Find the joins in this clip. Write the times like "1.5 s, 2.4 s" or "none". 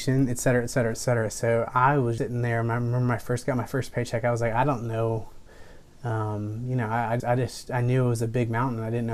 2.2 s, 7.2 s